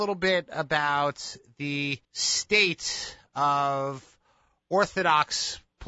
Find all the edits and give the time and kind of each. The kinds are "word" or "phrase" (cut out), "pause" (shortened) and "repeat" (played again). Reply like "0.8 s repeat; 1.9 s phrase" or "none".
2.0 s pause